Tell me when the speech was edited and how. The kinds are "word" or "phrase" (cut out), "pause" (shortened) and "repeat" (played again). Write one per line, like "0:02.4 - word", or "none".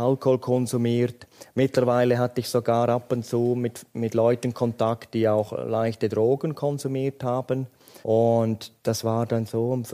0:08.0 - pause